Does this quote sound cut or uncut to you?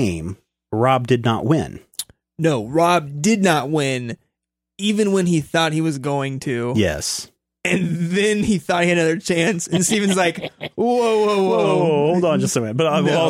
uncut